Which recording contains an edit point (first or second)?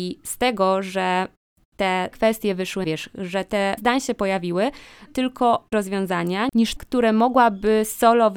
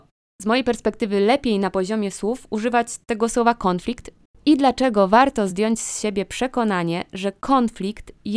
first